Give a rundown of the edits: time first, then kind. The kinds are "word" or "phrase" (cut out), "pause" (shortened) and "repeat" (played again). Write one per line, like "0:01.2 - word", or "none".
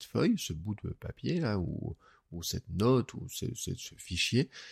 none